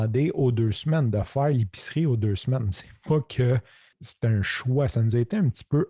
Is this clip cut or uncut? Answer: uncut